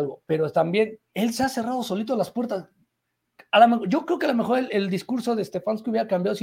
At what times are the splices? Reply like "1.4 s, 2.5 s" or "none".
1.1 s